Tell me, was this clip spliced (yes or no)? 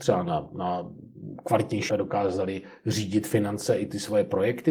yes